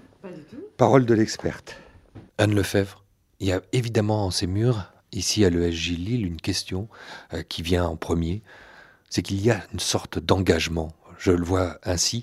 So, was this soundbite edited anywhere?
yes; 1 cut; at 2.3 s

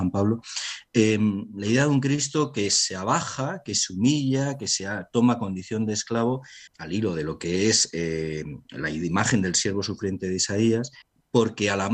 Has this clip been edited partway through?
yes; 2 cuts; at 6.7 s, 11.0 s

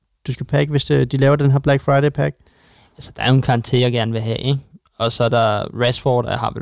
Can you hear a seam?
no; 0 cuts

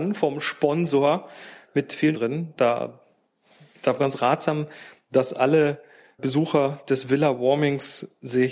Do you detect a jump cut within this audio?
yes; 3 cuts; at 2.1 s, 4.0 s, 6.2 s

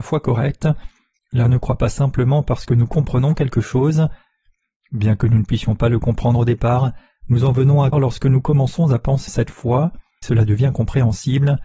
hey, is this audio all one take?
no; 4 cuts; at 1.5 s, 7.9 s, 9.3 s, 10.2 s

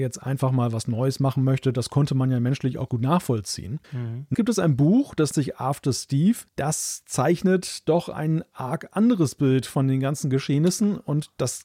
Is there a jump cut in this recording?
yes; 5 cuts; at 2.9 s, 3.8 s, 4.3 s, 5.3 s, 6.5 s

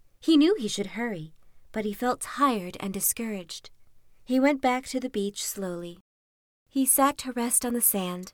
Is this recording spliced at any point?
no; 0 cuts

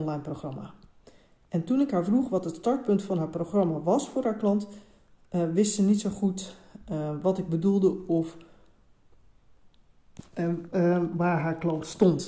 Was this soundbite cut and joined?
no; 0 cuts

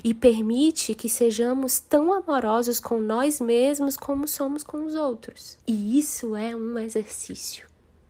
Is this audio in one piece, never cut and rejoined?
no; 1 cut; at 5.6 s

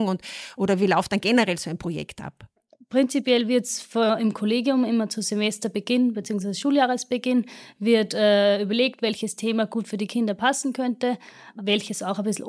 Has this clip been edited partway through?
no; 0 cuts

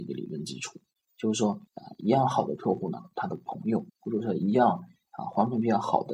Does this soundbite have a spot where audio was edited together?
yes; 2 cuts; at 1.7 s, 3.9 s

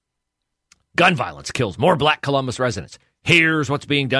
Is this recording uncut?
yes; 0 cuts

